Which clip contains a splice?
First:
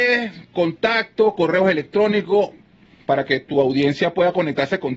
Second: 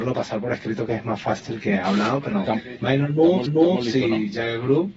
second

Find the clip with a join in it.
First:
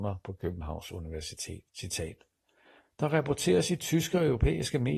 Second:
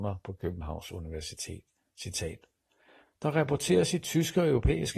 first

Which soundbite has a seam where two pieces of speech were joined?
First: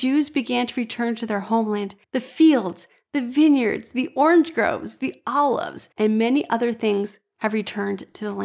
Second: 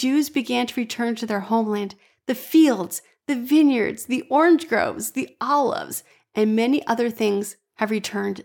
first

